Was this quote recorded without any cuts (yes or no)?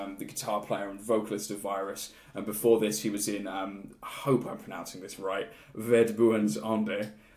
yes